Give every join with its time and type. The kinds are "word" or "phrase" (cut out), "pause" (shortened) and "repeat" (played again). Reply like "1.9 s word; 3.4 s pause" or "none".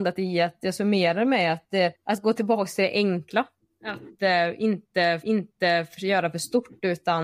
2.0 s pause; 5.2 s repeat